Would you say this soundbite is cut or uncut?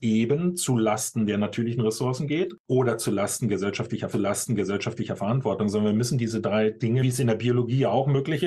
cut